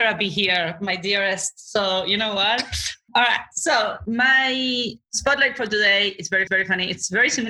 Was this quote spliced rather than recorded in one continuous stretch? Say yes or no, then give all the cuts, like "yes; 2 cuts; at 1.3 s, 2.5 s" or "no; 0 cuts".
yes; 1 cut; at 6.5 s